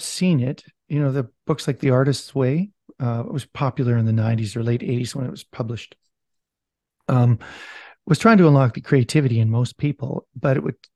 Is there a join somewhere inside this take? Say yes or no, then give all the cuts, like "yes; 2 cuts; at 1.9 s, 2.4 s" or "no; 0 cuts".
no; 0 cuts